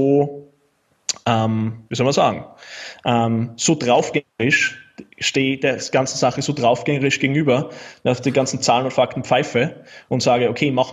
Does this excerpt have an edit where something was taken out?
yes; 1 cut; at 1.9 s

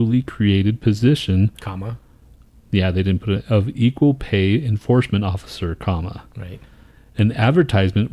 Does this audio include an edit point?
no; 0 cuts

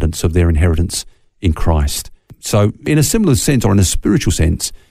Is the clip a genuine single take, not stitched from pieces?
yes; 0 cuts

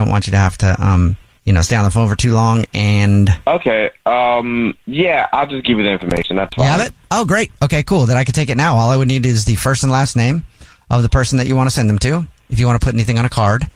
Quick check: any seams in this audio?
no; 0 cuts

